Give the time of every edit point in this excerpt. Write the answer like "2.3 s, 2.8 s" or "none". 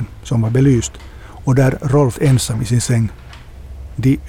2.1 s